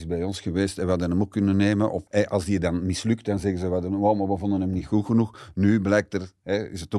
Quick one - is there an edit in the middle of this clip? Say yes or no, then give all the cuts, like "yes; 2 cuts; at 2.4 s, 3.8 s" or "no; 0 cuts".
yes; 1 cut; at 2.1 s